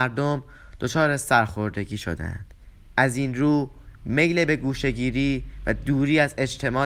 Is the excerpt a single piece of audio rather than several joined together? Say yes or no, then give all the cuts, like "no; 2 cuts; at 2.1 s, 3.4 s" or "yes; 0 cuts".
yes; 0 cuts